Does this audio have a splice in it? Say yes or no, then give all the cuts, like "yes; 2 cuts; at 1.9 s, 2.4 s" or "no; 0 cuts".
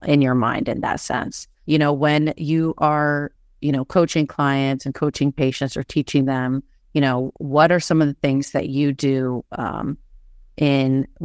no; 0 cuts